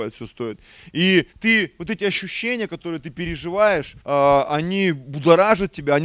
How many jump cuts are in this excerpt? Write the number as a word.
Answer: two